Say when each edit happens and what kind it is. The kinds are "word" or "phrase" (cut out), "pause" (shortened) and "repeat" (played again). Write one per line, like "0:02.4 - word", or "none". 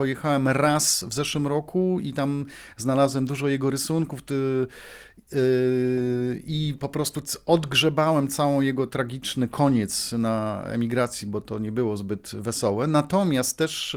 none